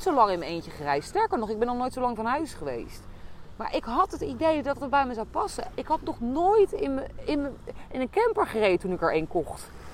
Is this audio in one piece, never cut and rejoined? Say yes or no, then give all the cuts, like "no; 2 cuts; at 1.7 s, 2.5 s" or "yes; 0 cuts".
yes; 0 cuts